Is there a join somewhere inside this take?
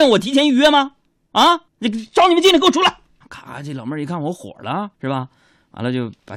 yes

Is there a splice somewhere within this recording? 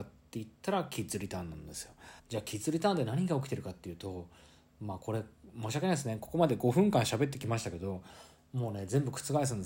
yes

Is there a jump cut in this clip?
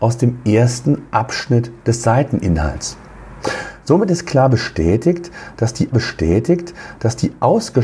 yes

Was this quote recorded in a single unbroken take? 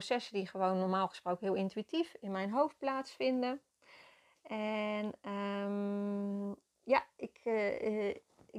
yes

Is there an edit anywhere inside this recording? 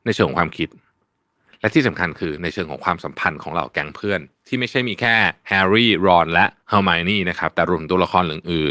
no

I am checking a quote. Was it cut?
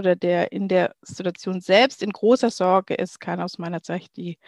no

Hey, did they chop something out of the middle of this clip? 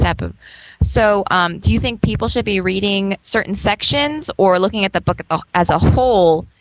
no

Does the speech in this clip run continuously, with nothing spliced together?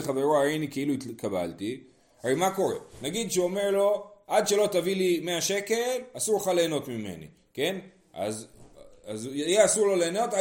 yes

